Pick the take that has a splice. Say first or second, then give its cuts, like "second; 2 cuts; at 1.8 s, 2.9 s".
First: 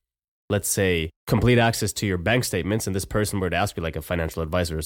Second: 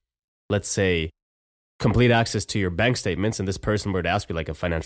first; 1 cut; at 1.2 s